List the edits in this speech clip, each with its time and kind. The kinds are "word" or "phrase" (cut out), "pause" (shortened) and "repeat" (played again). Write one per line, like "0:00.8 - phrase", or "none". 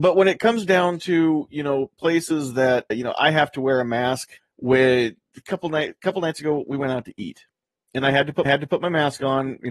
0:02.9 - word
0:04.4 - pause
0:08.4 - repeat

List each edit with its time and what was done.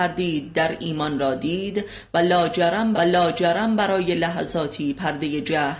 0:02.9 - repeat

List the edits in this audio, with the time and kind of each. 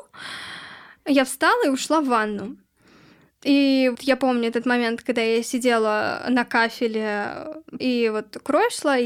0:03.9 - word
0:07.8 - word

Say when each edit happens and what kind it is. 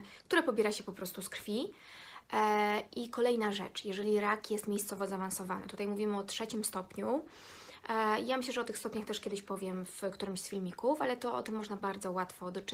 none

